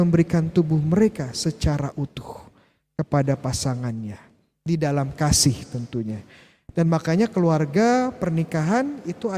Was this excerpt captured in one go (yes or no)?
yes